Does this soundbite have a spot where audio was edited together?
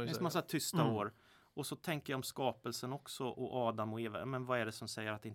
no; 0 cuts

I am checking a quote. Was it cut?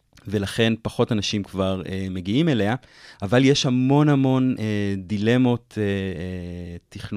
no; 0 cuts

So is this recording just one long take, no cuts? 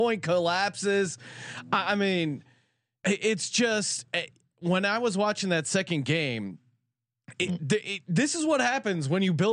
yes; 0 cuts

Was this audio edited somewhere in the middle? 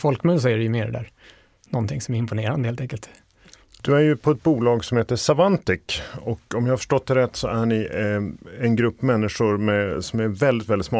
no; 0 cuts

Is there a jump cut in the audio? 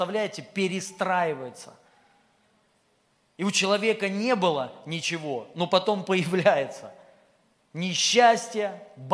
no; 0 cuts

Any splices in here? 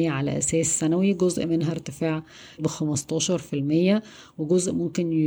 yes; 1 cut; at 2.6 s

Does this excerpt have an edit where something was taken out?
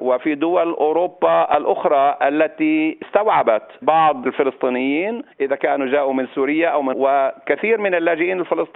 yes; 2 cuts; at 5.3 s, 6.9 s

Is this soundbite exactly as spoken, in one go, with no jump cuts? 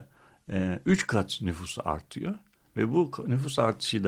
yes; 0 cuts

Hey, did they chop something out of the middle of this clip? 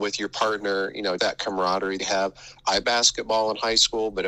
yes; 3 cuts; at 1.2 s, 2.0 s, 2.8 s

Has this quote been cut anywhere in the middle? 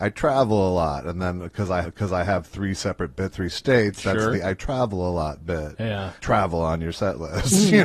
yes; 3 cuts; at 1.8 s, 3.3 s, 6.2 s

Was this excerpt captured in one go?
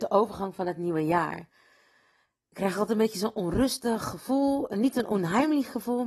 yes; 0 cuts

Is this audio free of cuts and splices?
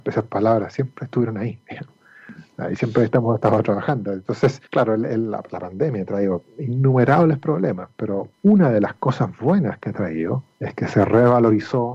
no; 3 cuts; at 4.7 s, 8.3 s, 10.5 s

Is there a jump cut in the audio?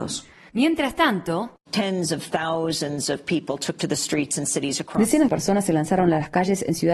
yes; 1 cut; at 5.3 s

